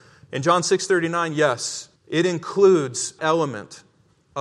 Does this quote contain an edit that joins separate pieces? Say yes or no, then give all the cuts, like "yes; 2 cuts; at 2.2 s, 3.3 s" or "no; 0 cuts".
yes; 2 cuts; at 2.0 s, 3.2 s